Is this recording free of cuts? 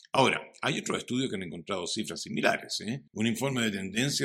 no; 1 cut; at 3.1 s

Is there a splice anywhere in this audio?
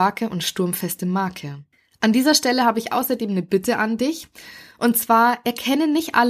yes; 1 cut; at 1.7 s

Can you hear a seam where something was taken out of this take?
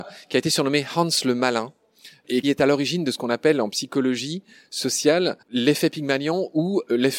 yes; 2 cuts; at 2.4 s, 5.4 s

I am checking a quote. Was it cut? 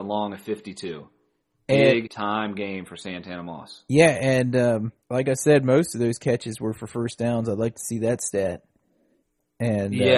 yes; 2 cuts; at 2.1 s, 5.0 s

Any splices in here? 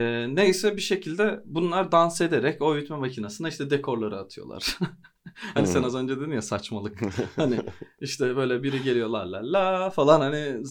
no; 0 cuts

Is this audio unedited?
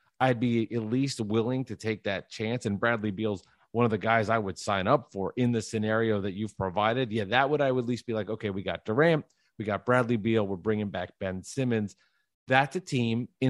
yes; 0 cuts

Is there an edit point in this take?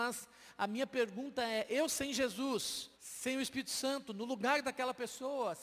yes; 1 cut; at 2.9 s

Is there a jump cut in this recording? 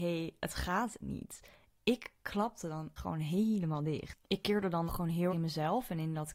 yes; 4 cuts; at 1.0 s, 3.0 s, 4.9 s, 5.3 s

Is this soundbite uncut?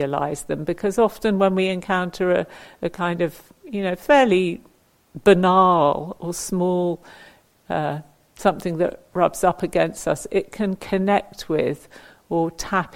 yes; 0 cuts

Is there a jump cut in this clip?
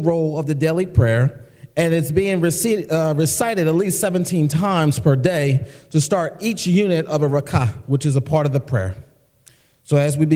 no; 0 cuts

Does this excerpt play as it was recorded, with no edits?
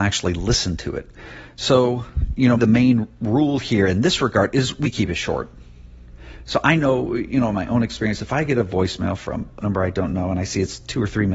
no; 3 cuts; at 2.6 s, 4.8 s, 9.6 s

